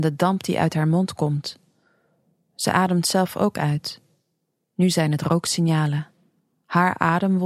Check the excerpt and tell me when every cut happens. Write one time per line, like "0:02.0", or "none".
none

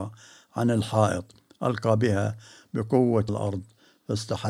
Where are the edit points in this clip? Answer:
0:03.3

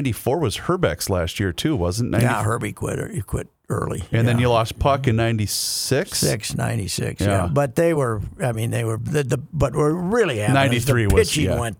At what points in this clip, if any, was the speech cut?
none

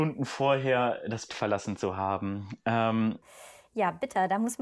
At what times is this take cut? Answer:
0:01.3

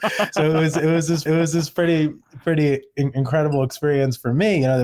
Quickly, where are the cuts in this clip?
0:01.3

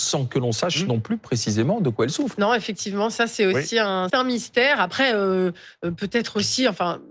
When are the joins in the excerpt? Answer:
0:04.1

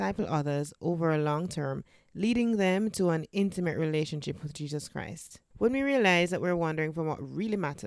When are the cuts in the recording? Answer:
none

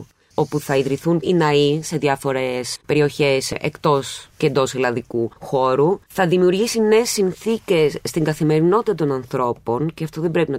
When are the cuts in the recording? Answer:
0:01.2
0:02.8
0:06.1

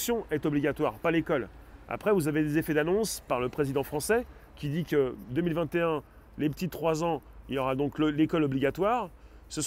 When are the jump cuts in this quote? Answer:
none

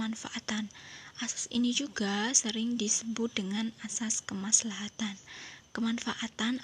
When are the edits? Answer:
none

